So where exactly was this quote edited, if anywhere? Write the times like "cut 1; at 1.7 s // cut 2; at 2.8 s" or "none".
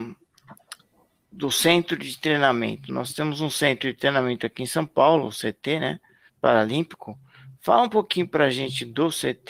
cut 1; at 6.3 s